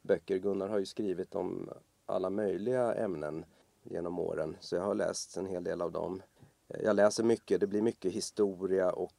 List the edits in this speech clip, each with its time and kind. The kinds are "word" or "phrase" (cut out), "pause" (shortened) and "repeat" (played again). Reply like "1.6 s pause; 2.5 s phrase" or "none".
3.6 s pause; 6.4 s pause

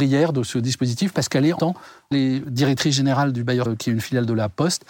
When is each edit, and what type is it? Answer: 1.6 s word; 2.1 s phrase; 2.4 s word; 3.7 s word

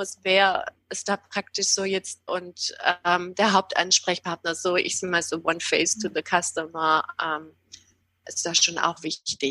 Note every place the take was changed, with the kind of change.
2.3 s phrase

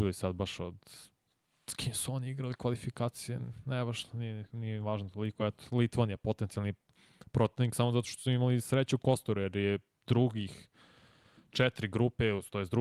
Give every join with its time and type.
none

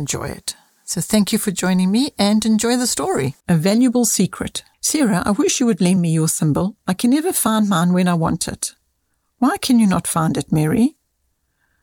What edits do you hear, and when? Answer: 3.4 s pause; 4.7 s pause

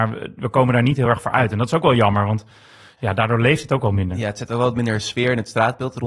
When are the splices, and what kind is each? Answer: none

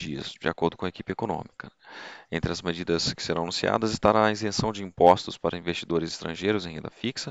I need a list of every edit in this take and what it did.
none

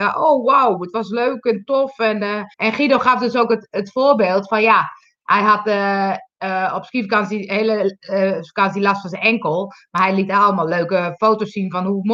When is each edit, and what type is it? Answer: 2.5 s pause

